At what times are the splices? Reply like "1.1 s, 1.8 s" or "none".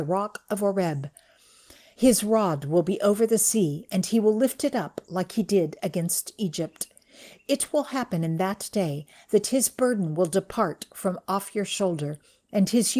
none